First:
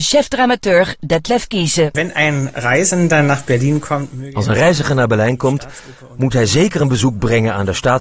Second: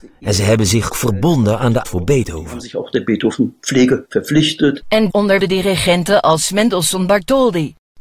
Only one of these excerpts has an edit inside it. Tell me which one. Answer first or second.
second